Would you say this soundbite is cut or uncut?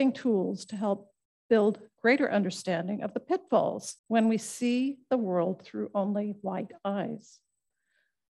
cut